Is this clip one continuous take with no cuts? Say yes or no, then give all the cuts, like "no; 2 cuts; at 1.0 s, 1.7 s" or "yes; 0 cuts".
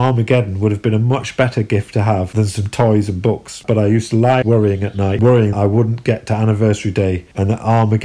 no; 2 cuts; at 4.4 s, 5.5 s